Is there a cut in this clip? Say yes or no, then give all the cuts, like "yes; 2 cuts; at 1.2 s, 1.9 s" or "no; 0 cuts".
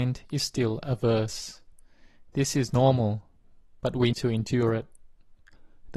yes; 1 cut; at 4.1 s